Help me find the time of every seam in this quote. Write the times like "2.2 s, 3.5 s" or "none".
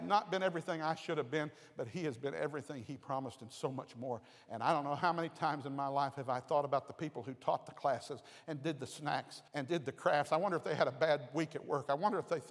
9.5 s